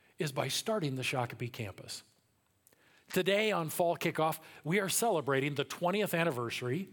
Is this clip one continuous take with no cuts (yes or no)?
yes